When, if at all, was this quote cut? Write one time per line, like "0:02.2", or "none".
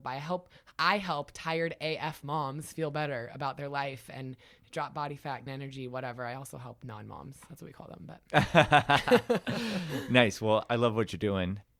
0:05.5